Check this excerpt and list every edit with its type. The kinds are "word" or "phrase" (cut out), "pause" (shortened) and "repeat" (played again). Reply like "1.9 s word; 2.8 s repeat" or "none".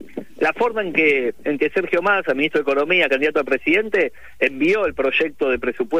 none